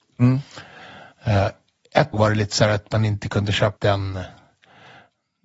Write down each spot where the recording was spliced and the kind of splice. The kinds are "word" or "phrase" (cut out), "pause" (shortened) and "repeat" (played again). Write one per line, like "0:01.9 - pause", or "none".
0:02.1 - word
0:03.8 - word